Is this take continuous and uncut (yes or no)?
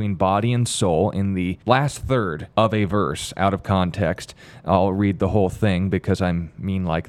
no